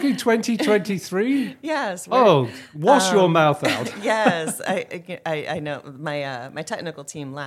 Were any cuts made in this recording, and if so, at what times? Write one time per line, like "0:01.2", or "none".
none